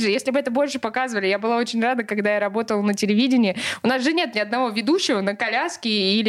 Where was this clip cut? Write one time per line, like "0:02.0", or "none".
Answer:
none